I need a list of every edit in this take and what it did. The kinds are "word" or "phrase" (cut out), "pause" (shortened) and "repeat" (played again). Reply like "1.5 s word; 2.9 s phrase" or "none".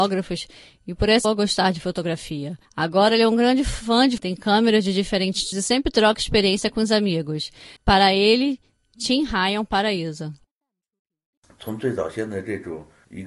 1.2 s phrase; 2.6 s pause; 4.2 s word; 5.5 s word; 7.8 s pause